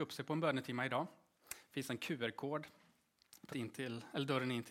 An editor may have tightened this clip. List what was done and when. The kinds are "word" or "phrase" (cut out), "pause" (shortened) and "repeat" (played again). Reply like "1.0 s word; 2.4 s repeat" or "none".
3.5 s word